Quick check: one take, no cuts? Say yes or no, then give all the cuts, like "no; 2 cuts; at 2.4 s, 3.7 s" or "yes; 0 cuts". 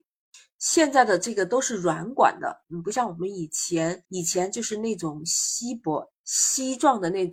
no; 1 cut; at 4.0 s